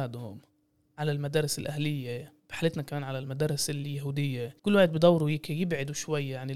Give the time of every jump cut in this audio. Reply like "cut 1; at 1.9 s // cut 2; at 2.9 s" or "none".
cut 1; at 2.4 s // cut 2; at 4.6 s